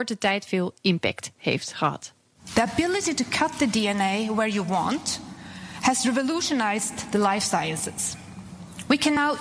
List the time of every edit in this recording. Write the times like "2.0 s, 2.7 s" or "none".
none